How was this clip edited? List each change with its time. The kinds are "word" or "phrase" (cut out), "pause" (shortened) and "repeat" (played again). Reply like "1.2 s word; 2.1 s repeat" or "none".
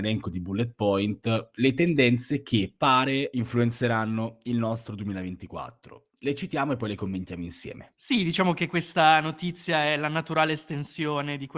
8.0 s pause